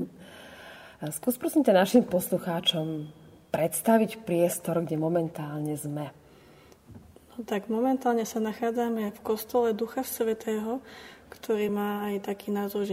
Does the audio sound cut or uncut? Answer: uncut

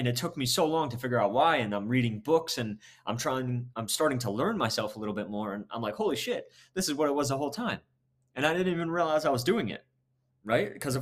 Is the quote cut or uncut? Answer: uncut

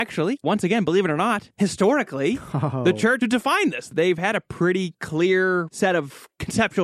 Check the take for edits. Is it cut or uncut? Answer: cut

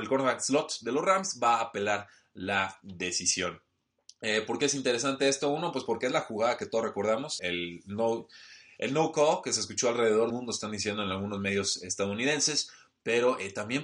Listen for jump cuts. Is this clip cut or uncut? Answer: cut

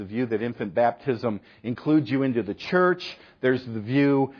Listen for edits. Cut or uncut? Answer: uncut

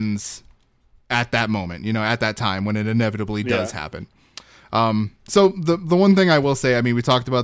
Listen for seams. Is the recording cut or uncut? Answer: uncut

